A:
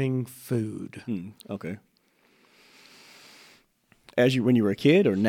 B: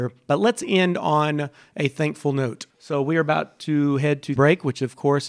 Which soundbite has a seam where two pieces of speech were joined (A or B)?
B